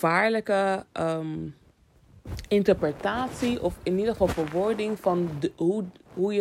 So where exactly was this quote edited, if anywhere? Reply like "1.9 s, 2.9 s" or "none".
none